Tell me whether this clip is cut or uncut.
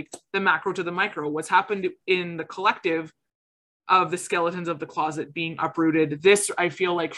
uncut